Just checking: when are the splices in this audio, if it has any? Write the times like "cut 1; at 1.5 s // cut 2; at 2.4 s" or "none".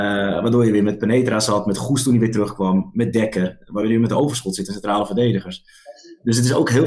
none